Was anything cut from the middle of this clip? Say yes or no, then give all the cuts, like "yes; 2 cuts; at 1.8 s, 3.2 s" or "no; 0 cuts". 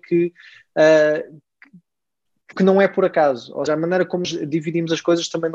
yes; 3 cuts; at 2.5 s, 3.7 s, 4.2 s